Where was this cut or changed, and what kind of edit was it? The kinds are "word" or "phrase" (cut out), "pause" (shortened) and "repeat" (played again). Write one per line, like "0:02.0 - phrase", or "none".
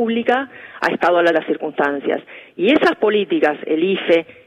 0:01.3 - phrase